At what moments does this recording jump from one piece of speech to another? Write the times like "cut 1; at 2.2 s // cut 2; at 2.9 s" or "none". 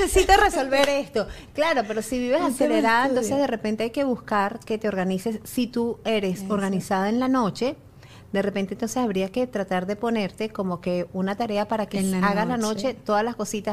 none